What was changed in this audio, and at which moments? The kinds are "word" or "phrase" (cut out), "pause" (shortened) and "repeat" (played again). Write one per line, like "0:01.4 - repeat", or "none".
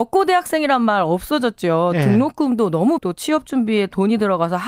0:03.0 - word